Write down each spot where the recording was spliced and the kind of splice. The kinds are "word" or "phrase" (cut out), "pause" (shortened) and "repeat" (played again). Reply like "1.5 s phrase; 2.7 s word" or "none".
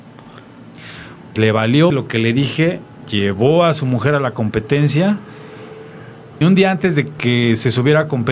1.4 s word; 1.9 s word; 6.4 s word

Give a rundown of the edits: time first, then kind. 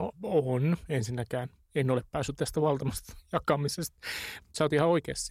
2.4 s word

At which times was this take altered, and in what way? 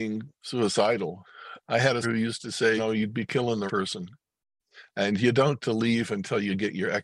1.6 s word; 2.0 s word; 2.8 s word; 3.7 s word; 5.6 s word

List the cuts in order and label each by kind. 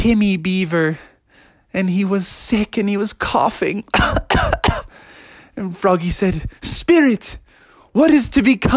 none

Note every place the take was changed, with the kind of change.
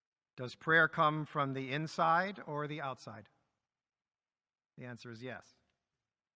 none

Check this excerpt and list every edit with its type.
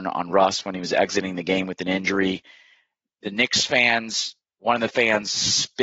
none

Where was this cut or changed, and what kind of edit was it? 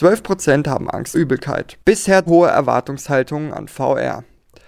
1.1 s word; 2.3 s word

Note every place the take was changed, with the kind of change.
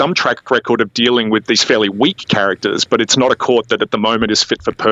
1.5 s word

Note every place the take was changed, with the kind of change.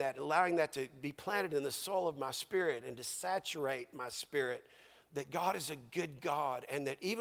none

